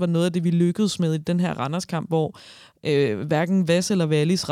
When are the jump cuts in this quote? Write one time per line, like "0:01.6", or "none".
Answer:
none